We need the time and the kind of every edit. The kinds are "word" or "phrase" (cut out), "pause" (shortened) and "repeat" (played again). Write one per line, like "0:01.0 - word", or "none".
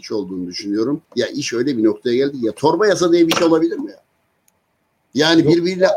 0:01.1 - pause